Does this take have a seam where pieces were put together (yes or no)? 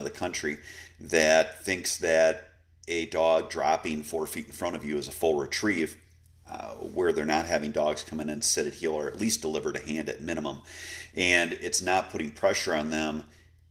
no